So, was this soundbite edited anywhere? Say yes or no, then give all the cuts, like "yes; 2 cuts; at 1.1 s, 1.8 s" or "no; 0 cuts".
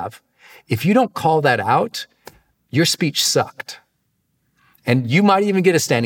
no; 0 cuts